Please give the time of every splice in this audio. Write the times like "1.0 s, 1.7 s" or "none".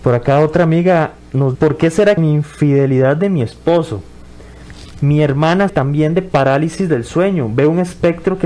1.5 s, 2.2 s, 5.7 s